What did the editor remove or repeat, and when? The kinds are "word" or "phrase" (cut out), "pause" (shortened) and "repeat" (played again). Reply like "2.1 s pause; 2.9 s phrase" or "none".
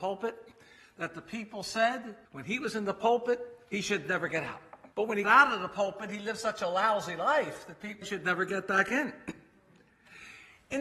2.2 s pause; 4.9 s pause; 5.2 s word; 8.0 s word